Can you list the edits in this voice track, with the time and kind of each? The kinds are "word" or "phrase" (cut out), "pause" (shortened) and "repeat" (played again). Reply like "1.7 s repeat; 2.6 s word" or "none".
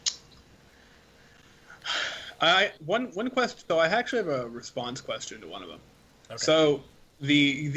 2.8 s word; 3.7 s word